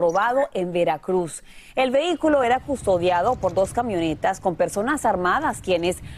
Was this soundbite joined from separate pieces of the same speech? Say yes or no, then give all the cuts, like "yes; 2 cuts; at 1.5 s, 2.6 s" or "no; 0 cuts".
no; 0 cuts